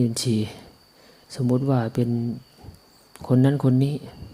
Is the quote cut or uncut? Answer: cut